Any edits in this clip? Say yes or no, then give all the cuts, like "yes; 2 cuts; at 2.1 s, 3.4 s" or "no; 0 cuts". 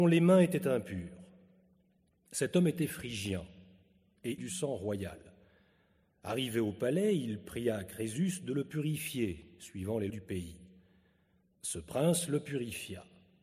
yes; 2 cuts; at 4.4 s, 10.1 s